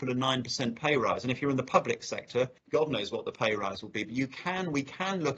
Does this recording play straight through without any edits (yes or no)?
no